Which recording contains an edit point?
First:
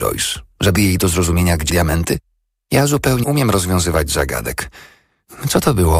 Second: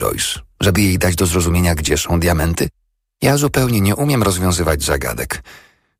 first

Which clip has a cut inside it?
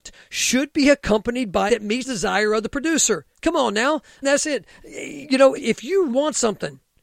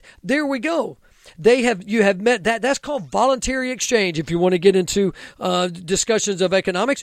first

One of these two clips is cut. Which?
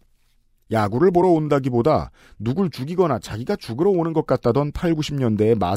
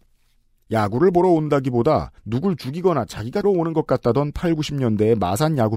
second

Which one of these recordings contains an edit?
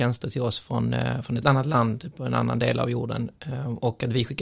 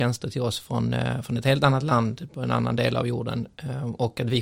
first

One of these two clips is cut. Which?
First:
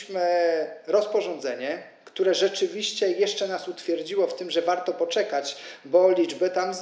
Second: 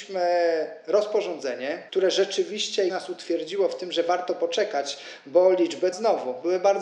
second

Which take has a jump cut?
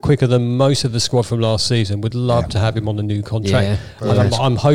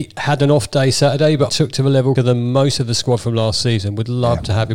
second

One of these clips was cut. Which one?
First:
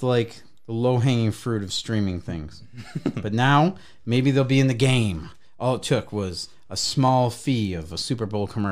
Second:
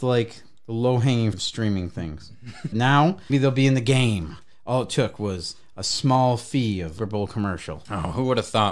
second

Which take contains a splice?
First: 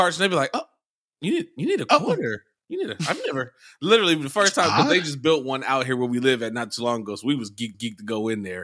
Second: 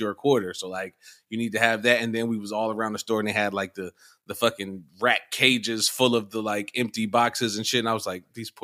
first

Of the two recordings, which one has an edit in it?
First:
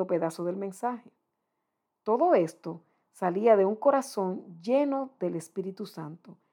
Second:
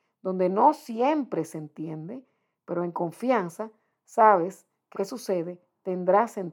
second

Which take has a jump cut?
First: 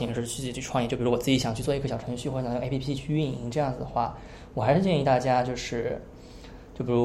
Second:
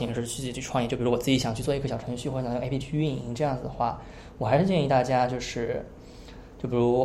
second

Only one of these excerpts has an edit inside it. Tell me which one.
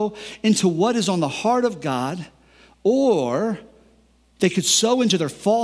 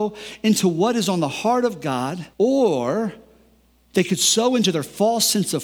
second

